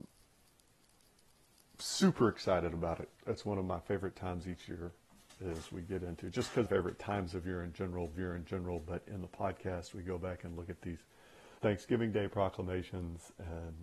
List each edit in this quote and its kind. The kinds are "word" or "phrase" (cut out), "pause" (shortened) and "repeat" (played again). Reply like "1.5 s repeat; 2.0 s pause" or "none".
3.2 s pause; 6.7 s phrase; 8.1 s repeat; 11.6 s pause